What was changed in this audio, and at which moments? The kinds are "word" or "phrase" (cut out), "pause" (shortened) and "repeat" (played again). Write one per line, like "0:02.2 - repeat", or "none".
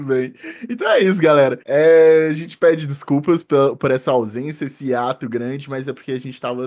0:01.6 - pause